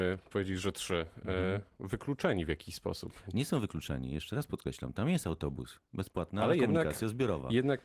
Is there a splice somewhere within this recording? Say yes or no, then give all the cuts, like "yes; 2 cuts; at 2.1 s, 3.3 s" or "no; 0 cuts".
no; 0 cuts